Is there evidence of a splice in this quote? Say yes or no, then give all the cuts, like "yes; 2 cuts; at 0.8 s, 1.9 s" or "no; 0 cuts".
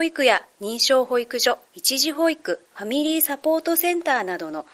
yes; 2 cuts; at 1.7 s, 2.7 s